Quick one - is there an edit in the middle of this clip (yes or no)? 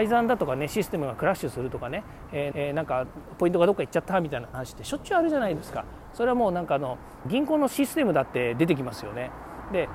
yes